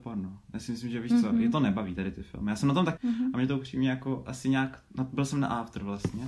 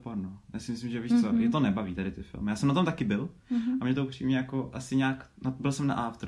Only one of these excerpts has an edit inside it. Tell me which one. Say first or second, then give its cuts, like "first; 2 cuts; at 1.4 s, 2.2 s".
first; 1 cut; at 3.0 s